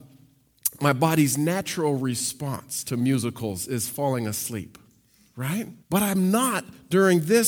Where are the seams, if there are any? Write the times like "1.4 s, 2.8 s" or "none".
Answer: 5.8 s

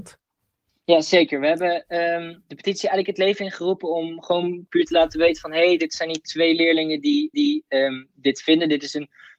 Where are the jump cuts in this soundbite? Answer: 7.3 s

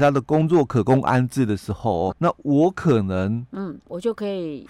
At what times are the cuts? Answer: 2.1 s

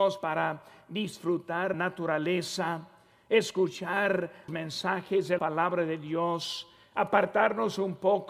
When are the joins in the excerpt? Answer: 1.7 s, 4.5 s, 5.4 s

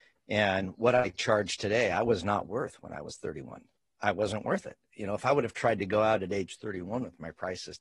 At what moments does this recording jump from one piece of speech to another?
3.8 s

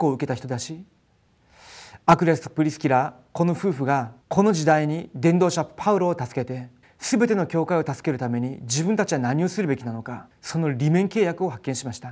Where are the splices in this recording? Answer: 4.2 s, 6.8 s, 10.3 s

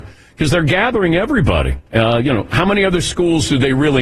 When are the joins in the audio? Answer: 1.9 s

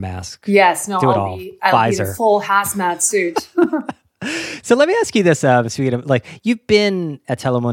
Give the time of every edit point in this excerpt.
none

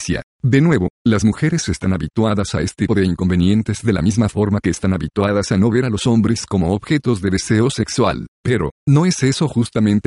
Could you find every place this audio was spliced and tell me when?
2.9 s

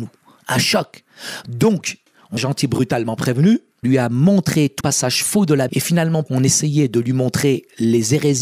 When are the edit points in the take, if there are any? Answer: 2.4 s, 3.8 s, 4.8 s, 5.7 s, 6.3 s

